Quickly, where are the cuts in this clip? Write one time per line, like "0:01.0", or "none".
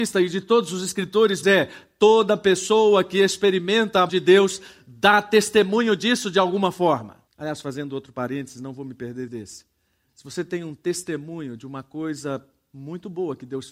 0:01.4
0:04.1
0:07.3
0:09.3